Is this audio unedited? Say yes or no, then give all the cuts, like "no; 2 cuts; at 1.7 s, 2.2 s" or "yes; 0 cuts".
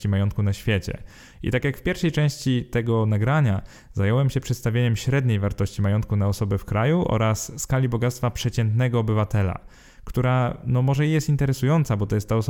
yes; 0 cuts